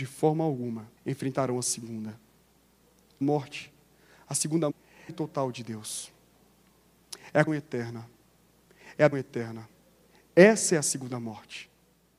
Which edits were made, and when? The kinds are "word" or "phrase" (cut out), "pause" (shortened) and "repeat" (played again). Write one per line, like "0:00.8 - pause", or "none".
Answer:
0:01.0 - pause
0:03.2 - phrase
0:04.7 - word
0:05.1 - phrase
0:07.5 - word
0:09.1 - word